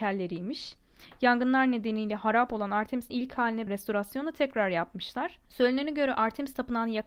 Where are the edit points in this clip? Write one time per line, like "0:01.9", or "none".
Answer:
0:03.1
0:03.7
0:05.5